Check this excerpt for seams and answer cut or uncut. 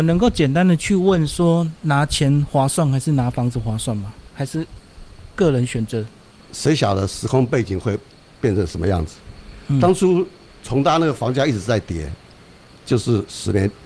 uncut